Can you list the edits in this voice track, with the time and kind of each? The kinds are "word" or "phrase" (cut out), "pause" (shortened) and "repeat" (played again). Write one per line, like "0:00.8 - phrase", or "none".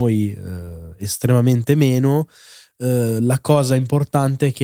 none

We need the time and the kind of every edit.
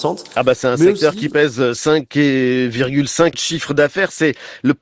0:03.3 - phrase

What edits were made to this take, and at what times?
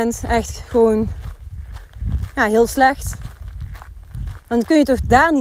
0:04.4 - pause

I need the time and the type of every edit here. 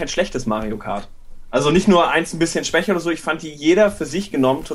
none

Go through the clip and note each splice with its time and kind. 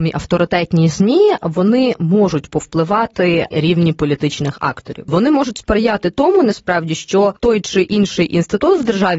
0:03.5 - phrase

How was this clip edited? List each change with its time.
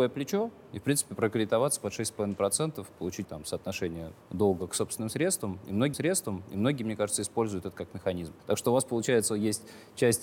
0:03.2 - word
0:05.9 - repeat
0:08.4 - pause

